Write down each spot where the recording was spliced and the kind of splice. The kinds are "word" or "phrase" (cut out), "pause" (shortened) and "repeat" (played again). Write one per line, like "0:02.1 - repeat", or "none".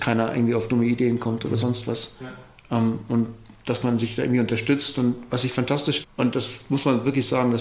0:06.0 - word